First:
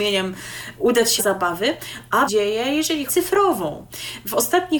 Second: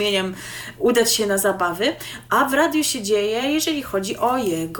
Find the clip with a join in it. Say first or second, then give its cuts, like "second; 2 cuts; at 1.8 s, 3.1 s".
first; 3 cuts; at 1.2 s, 2.3 s, 3.1 s